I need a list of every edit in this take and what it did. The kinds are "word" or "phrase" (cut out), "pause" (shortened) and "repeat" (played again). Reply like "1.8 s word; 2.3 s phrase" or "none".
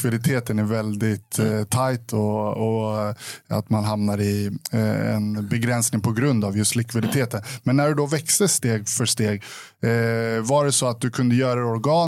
none